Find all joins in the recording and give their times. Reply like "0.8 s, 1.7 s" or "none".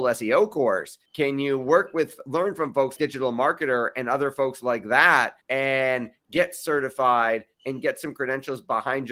1.1 s, 3.0 s, 5.4 s